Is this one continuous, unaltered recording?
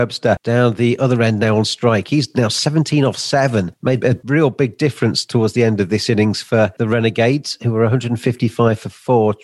yes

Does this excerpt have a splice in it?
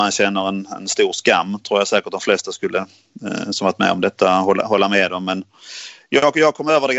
no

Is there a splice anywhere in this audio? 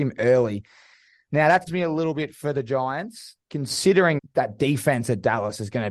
yes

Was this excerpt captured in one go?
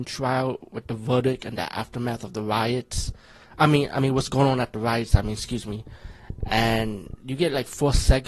yes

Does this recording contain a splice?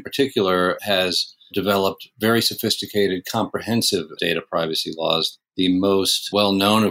yes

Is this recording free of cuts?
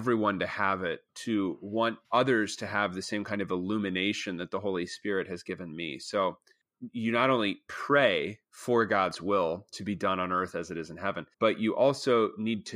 no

